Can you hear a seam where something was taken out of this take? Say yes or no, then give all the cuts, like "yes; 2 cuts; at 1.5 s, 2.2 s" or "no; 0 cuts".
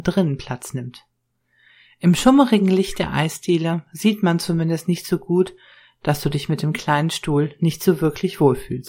no; 0 cuts